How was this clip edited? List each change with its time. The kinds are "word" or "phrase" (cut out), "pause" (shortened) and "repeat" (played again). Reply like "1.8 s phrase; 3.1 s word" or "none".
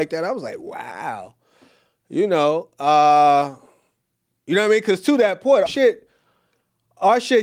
5.7 s word